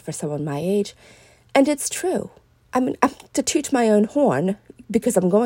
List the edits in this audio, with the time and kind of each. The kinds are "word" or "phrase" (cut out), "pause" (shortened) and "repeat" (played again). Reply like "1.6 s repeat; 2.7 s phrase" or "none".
none